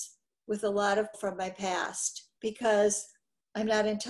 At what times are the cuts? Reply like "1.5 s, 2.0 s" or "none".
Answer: 1.1 s, 2.4 s